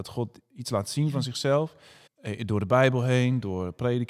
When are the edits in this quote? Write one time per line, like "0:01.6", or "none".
0:02.1